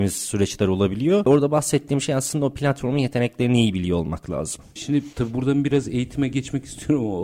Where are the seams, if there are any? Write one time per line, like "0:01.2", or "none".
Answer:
none